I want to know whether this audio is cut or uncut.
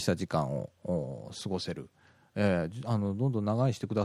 uncut